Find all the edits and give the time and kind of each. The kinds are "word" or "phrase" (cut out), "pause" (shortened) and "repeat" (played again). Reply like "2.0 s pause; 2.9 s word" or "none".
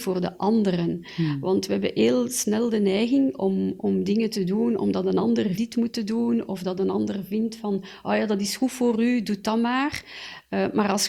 5.6 s phrase